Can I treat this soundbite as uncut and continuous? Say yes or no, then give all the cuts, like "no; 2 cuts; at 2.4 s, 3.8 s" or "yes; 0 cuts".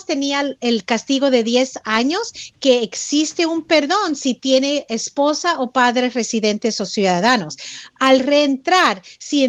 yes; 0 cuts